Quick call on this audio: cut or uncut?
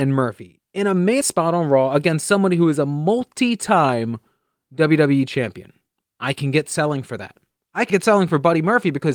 cut